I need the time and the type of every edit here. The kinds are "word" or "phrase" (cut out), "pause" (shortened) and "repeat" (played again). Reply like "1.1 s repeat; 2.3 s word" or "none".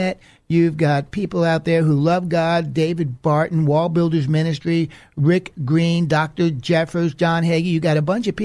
none